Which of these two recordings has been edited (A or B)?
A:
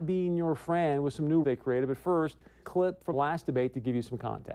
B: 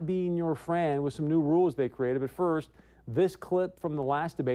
A